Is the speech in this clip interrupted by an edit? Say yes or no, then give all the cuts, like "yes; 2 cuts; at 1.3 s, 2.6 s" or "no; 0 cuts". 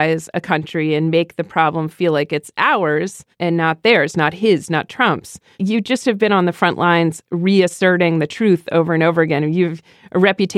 no; 0 cuts